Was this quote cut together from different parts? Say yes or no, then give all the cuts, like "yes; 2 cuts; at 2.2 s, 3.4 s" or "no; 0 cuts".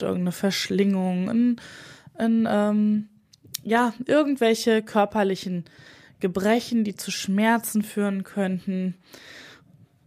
no; 0 cuts